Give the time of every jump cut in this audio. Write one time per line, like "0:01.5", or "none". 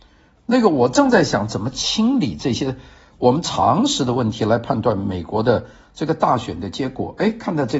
none